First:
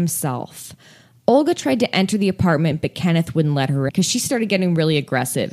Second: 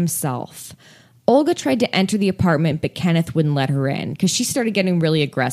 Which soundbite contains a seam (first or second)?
first